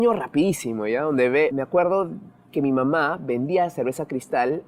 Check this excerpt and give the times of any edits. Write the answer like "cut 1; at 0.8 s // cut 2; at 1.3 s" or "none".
none